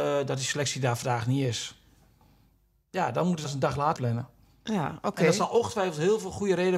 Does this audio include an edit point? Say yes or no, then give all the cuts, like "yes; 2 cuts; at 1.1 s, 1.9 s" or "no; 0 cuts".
yes; 2 cuts; at 3.4 s, 4.0 s